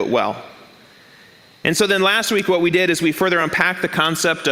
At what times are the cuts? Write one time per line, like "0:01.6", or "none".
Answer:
none